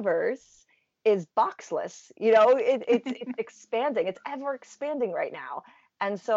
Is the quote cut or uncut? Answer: uncut